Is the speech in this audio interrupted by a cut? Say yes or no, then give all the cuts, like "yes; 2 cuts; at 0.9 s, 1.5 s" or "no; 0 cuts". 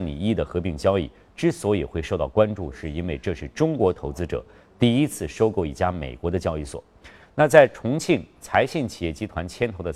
no; 0 cuts